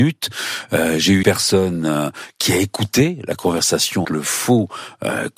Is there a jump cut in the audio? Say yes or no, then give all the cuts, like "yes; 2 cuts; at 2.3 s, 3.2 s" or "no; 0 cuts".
yes; 2 cuts; at 1.2 s, 4.0 s